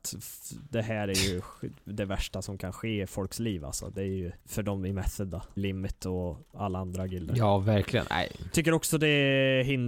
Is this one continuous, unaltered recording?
no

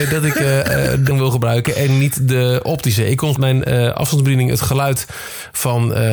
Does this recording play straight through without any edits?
no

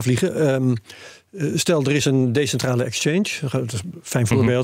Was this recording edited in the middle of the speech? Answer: no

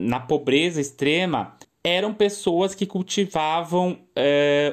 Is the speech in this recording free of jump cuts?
no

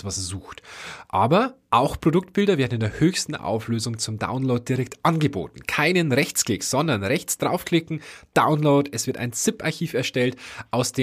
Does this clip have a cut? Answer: no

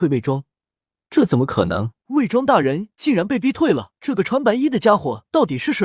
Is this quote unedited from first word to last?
no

